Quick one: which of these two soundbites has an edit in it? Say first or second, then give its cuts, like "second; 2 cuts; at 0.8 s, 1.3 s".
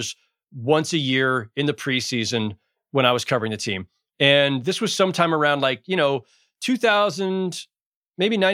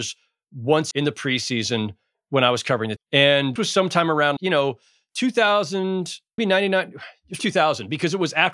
second; 6 cuts; at 0.9 s, 3.0 s, 3.6 s, 4.4 s, 6.4 s, 7.4 s